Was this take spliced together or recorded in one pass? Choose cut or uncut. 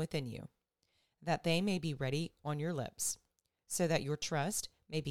uncut